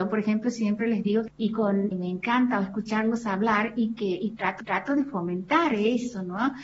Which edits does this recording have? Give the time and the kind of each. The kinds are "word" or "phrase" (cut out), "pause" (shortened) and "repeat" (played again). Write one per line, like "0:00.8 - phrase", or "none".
0:01.3 - phrase
0:01.9 - word
0:04.6 - repeat